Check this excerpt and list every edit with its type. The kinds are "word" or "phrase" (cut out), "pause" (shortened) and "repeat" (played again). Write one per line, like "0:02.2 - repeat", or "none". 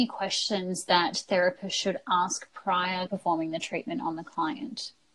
0:03.1 - word